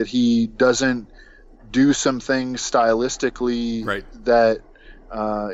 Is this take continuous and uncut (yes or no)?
yes